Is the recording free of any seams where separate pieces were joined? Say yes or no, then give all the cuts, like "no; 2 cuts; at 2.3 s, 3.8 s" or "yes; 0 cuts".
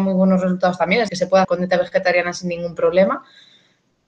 no; 2 cuts; at 1.1 s, 1.4 s